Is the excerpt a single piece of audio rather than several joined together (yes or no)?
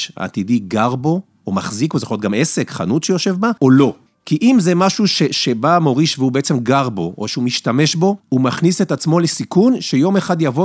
no